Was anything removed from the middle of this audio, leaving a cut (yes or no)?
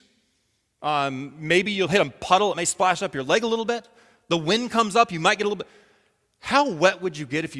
no